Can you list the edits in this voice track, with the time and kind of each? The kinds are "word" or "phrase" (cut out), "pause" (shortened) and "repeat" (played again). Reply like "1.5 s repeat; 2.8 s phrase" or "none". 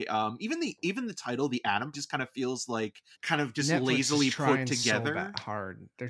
1.9 s phrase; 3.1 s pause